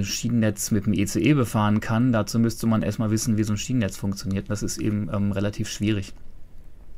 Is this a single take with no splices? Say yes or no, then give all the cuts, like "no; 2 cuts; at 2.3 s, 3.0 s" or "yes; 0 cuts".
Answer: yes; 0 cuts